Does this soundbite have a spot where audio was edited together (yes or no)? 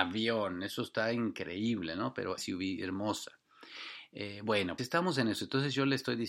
yes